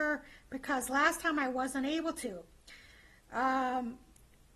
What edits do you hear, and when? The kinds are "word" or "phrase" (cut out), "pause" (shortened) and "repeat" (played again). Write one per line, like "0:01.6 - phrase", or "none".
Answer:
none